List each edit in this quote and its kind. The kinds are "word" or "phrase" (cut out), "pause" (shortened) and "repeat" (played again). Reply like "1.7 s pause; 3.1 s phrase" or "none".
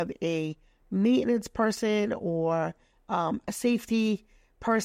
none